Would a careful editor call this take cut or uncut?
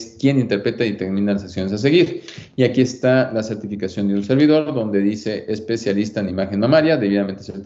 uncut